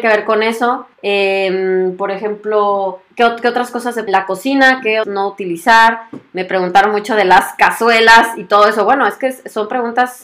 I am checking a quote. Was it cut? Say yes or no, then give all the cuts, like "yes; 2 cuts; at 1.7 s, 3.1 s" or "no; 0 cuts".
yes; 4 cuts; at 0.9 s, 3.1 s, 4.1 s, 5.0 s